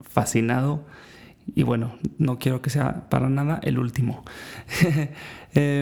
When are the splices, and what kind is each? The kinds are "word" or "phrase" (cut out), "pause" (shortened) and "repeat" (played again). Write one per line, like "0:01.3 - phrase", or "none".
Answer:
none